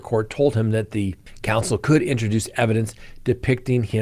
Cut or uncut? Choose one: uncut